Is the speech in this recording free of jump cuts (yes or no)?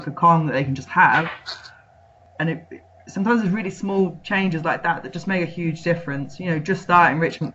yes